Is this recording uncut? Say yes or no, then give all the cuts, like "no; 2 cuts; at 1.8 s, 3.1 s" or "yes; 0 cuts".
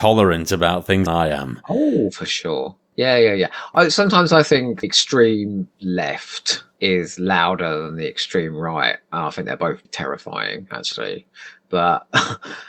no; 3 cuts; at 1.1 s, 4.8 s, 9.8 s